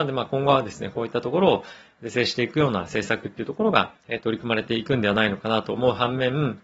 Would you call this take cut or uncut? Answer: cut